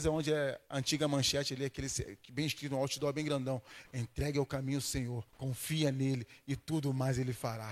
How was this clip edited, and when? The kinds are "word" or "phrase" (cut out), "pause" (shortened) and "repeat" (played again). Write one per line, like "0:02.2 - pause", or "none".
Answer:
0:05.3 - pause